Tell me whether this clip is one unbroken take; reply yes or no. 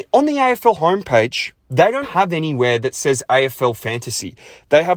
no